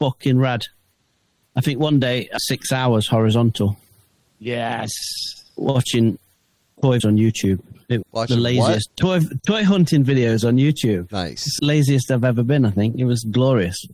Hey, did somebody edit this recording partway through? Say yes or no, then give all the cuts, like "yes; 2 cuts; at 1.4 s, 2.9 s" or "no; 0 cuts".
yes; 6 cuts; at 2.4 s, 7.0 s, 8.0 s, 8.9 s, 9.4 s, 11.6 s